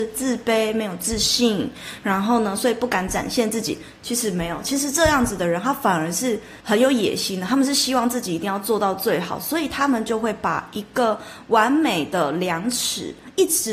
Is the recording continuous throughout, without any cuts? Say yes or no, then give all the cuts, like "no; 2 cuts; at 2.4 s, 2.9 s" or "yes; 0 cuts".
no; 1 cut; at 6.6 s